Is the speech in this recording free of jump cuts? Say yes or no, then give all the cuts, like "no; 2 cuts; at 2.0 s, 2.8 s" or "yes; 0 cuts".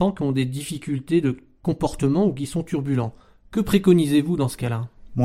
yes; 0 cuts